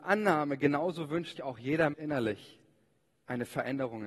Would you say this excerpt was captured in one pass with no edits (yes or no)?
no